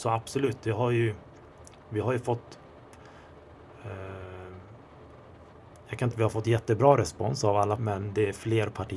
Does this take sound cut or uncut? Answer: cut